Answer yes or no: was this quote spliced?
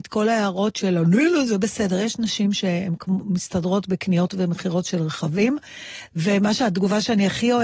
no